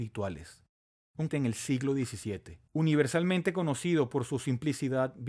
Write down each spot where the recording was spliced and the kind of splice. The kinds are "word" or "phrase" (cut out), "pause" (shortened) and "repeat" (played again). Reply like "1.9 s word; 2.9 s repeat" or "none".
1.3 s phrase; 2.7 s pause